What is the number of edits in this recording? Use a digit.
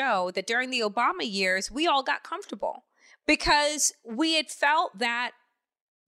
1